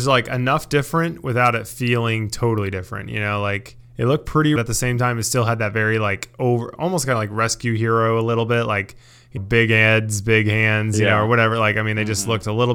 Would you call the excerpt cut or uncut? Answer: cut